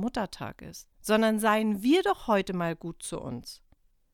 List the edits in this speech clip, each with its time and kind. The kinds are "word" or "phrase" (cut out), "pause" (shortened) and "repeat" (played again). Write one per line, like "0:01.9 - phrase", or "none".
0:00.9 - pause

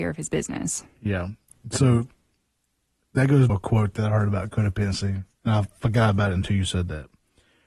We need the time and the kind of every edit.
0:03.5 - phrase

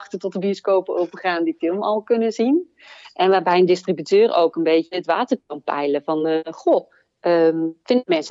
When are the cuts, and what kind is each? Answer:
none

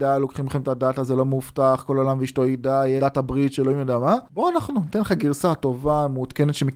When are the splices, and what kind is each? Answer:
0:03.0 - word
0:04.3 - pause

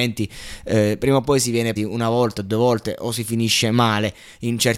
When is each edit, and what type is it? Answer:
0:01.8 - word

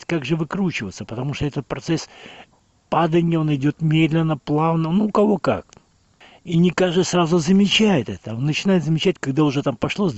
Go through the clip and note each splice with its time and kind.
none

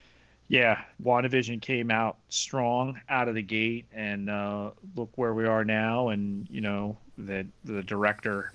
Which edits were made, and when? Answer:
none

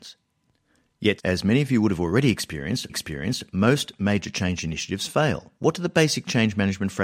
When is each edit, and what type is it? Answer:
0:01.2 - word
0:02.9 - repeat
0:05.6 - pause

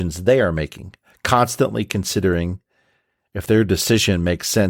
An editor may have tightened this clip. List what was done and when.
none

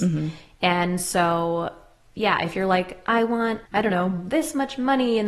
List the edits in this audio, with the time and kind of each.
0:03.6 - pause

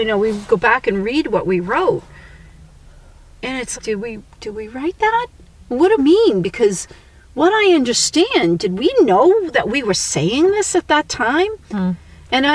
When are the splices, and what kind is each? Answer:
0:03.8 - word
0:06.0 - word

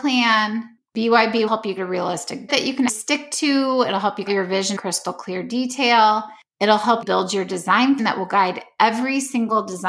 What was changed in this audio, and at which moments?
0:01.5 - word
0:01.8 - word
0:02.5 - word
0:02.9 - word
0:04.3 - word
0:04.8 - word
0:07.0 - word
0:08.0 - word

